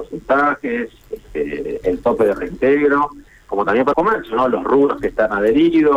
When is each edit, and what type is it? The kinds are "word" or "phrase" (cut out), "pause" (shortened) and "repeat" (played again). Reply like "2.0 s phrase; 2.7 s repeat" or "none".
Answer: 1.8 s word; 3.9 s word